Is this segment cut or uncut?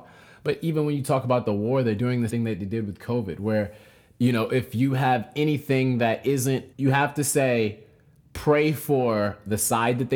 cut